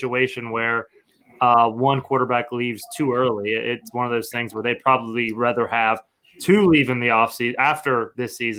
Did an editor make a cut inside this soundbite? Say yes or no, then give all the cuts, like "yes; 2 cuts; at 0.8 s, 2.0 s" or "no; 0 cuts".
no; 0 cuts